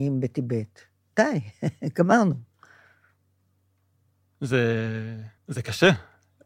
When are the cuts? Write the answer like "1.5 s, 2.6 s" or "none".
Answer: 5.4 s